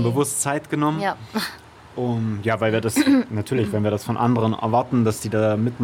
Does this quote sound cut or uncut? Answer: uncut